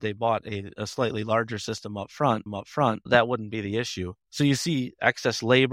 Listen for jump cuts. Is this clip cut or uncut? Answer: cut